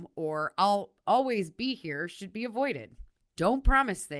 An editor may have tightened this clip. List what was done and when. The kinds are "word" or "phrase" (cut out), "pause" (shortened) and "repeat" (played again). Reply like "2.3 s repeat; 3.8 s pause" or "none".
none